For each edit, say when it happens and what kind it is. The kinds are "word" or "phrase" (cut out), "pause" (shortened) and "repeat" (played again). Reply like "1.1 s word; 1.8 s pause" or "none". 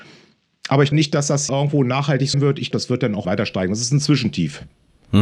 0.9 s word; 1.5 s word; 2.3 s word; 2.7 s word; 3.2 s word

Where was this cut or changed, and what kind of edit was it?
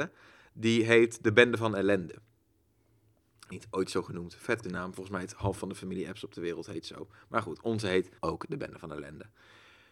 3.5 s word; 4.6 s word; 8.2 s pause

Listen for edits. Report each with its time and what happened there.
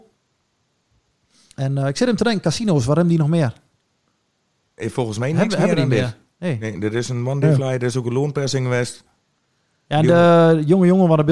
none

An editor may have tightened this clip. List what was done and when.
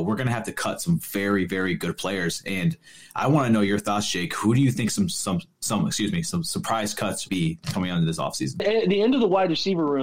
7.3 s word

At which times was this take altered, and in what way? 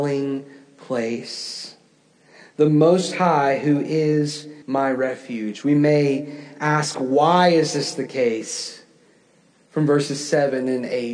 4.6 s pause

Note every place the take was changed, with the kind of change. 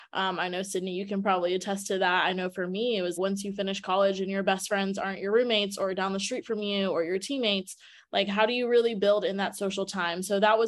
3.2 s word

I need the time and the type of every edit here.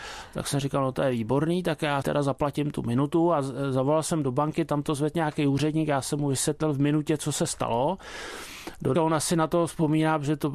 2.0 s word; 8.9 s word

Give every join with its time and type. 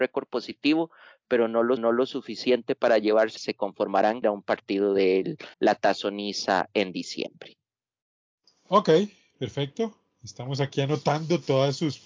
1.8 s repeat; 3.4 s phrase; 4.2 s phrase; 5.5 s pause; 8.4 s pause

